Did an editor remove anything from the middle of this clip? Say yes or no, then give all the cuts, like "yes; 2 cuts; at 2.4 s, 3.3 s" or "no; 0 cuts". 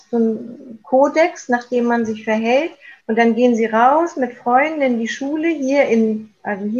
yes; 1 cut; at 3.0 s